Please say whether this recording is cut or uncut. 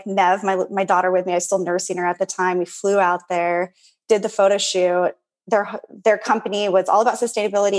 uncut